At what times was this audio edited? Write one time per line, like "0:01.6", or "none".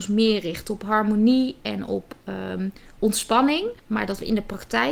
0:03.8